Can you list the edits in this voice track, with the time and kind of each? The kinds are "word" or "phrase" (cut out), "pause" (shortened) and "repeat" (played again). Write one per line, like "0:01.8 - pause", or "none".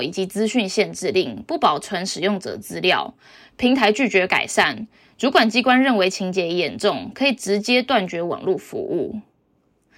none